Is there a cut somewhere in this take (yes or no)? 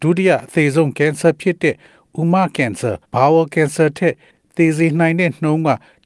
yes